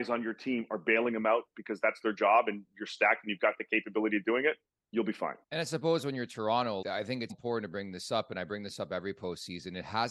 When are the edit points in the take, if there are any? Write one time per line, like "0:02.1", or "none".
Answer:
0:04.7
0:05.4
0:06.8
0:07.3